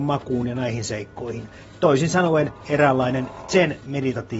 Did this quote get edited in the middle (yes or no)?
no